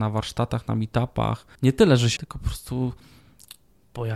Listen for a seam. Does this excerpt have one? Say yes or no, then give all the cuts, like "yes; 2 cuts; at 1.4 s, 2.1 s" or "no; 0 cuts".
yes; 2 cuts; at 1.5 s, 2.2 s